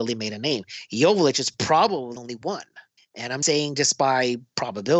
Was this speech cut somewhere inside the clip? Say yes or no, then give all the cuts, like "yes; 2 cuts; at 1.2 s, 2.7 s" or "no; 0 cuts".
yes; 3 cuts; at 2.2 s, 3.0 s, 3.4 s